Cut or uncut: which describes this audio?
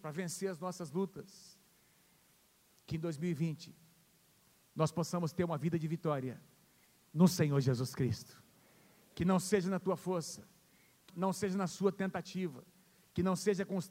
cut